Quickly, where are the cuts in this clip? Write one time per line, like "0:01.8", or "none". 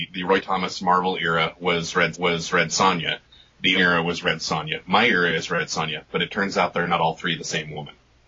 0:02.1
0:03.8